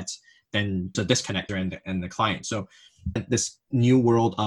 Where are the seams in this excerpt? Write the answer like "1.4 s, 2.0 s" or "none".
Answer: 0.9 s, 1.5 s, 3.2 s